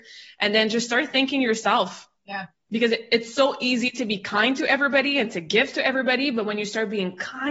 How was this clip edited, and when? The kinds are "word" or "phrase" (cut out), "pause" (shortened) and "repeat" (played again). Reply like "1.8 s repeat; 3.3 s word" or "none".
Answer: 2.2 s pause

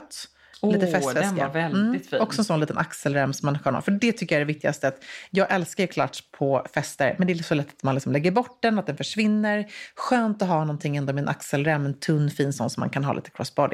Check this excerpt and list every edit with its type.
none

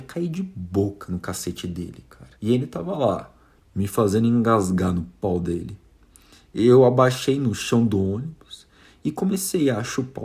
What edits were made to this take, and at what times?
2.4 s pause

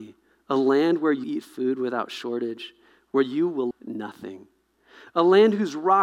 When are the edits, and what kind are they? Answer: 1.2 s word; 3.7 s word

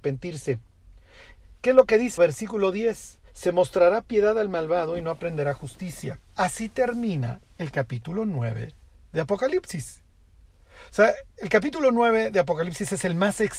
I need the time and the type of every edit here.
2.2 s word; 3.3 s pause; 6.3 s pause

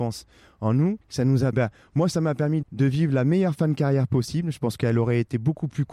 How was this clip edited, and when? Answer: 1.0 s pause; 1.5 s word; 2.6 s word

